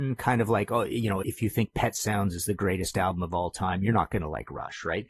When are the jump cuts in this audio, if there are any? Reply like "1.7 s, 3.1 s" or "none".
1.2 s